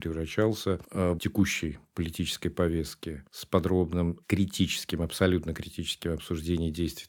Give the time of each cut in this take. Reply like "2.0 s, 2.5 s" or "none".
1.2 s, 3.3 s, 4.2 s